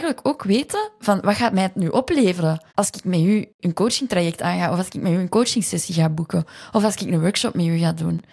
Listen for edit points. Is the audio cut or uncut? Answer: cut